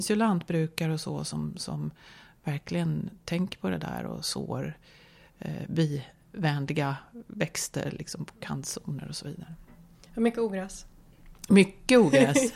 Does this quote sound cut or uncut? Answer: uncut